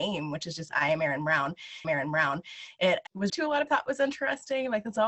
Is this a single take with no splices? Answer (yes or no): no